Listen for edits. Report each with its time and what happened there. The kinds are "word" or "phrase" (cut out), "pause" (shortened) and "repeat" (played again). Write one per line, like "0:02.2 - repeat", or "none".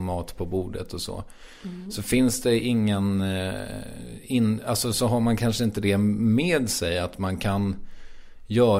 none